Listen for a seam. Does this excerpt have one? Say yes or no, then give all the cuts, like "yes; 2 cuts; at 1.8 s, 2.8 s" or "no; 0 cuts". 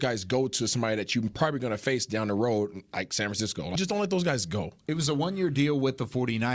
yes; 1 cut; at 3.8 s